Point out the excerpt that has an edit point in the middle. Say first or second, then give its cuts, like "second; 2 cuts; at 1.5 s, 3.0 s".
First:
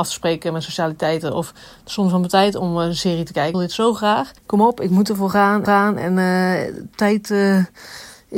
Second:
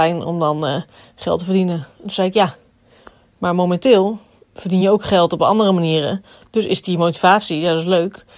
first; 3 cuts; at 3.5 s, 4.4 s, 5.7 s